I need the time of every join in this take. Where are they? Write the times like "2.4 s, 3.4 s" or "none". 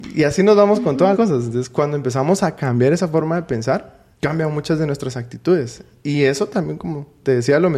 1.1 s, 4.1 s